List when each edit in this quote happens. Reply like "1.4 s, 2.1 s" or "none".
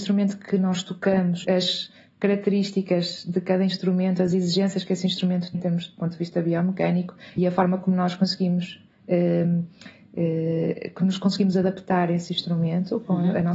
1.4 s, 5.5 s, 7.4 s